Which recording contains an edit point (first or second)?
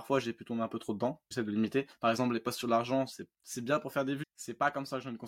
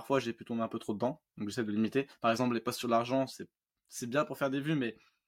first